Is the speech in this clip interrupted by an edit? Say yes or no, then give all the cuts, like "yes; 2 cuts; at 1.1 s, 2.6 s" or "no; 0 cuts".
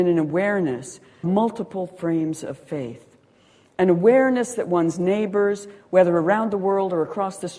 yes; 1 cut; at 1.2 s